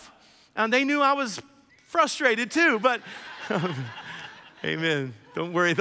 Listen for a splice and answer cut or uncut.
cut